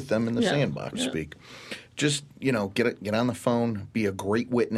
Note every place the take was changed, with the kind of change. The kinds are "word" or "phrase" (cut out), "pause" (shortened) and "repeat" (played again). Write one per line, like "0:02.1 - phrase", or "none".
0:00.9 - word